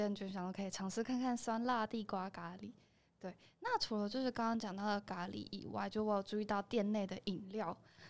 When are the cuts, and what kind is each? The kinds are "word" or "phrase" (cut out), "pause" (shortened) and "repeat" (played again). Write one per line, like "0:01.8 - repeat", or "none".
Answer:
none